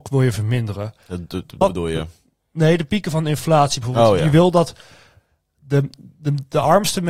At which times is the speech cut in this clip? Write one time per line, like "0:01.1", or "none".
0:01.6